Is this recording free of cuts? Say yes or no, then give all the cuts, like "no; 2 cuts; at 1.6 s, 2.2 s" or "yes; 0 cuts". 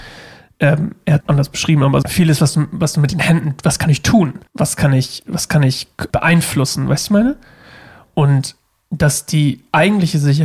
no; 4 cuts; at 1.2 s, 2.0 s, 4.5 s, 6.1 s